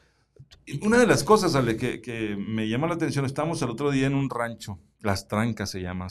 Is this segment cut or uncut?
uncut